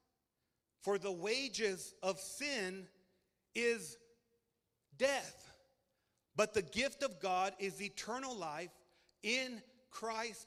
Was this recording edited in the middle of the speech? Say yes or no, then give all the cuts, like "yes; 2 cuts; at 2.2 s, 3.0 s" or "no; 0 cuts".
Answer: no; 0 cuts